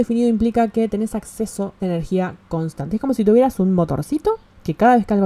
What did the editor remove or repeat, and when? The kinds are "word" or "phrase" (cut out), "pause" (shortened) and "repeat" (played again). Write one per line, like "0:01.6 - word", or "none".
0:01.8 - word